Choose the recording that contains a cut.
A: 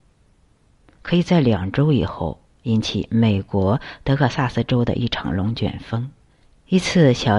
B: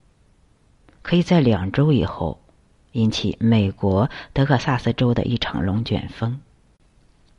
A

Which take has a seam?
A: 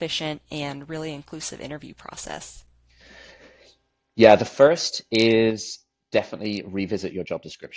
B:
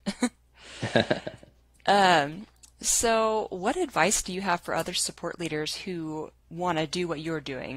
B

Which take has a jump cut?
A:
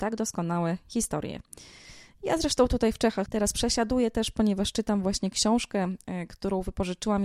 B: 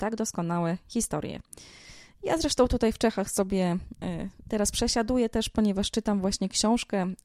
A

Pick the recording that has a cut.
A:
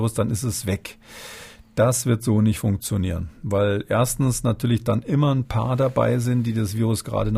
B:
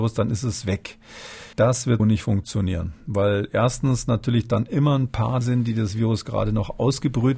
B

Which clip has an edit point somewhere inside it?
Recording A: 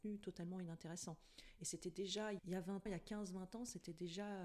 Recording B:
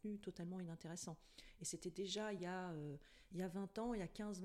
A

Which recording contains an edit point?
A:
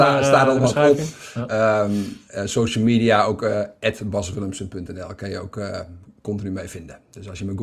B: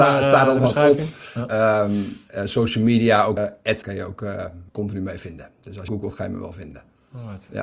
B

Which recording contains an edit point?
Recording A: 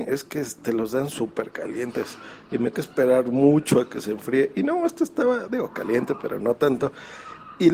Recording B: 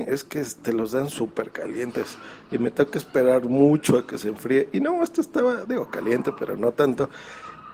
A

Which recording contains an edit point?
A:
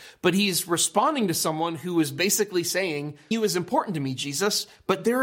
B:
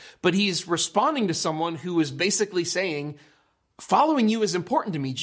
A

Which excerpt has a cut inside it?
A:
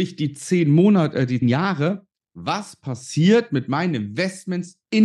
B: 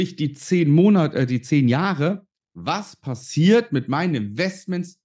A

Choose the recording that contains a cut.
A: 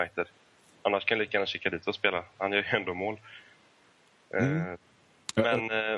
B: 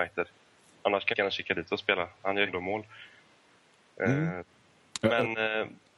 B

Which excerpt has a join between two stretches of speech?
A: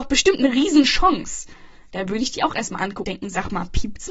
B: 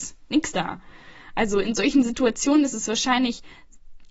A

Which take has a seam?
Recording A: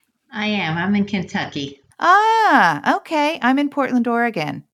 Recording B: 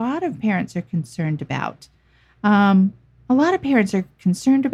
A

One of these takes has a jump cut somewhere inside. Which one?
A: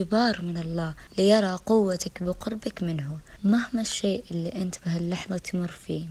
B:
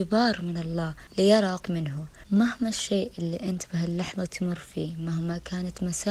B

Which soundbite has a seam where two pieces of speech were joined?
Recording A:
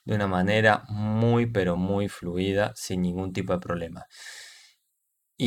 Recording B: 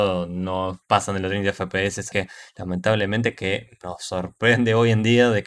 B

